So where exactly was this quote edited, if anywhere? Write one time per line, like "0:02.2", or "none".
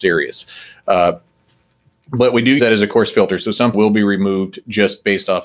0:02.6
0:03.7

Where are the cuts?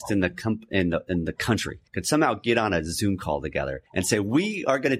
0:01.9
0:03.9

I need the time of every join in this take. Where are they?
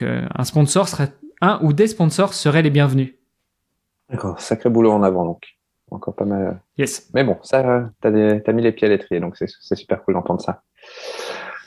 none

